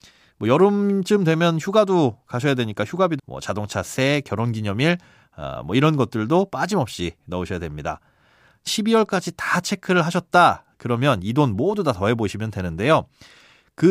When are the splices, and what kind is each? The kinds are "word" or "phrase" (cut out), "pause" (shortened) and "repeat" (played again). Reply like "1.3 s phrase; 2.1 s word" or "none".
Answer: 3.2 s phrase; 8.7 s word